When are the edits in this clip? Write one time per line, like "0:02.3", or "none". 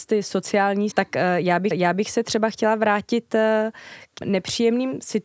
0:00.9
0:01.7
0:04.2